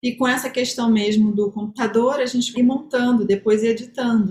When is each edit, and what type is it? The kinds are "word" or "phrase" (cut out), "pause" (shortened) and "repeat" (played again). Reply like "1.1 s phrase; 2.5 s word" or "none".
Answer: 2.5 s word